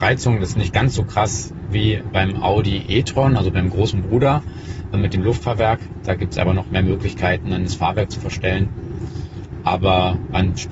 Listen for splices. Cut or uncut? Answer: cut